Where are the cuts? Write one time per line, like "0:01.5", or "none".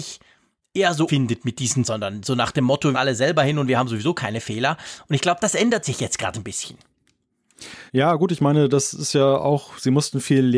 0:01.1
0:01.8
0:02.9
0:07.9